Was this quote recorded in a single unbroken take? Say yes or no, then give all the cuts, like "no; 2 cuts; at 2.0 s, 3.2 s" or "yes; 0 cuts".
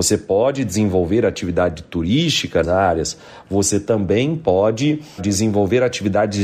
no; 2 cuts; at 2.6 s, 5.2 s